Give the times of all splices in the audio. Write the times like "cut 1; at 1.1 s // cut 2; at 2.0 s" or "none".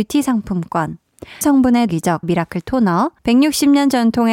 cut 1; at 1.4 s // cut 2; at 1.9 s // cut 3; at 2.2 s // cut 4; at 3.2 s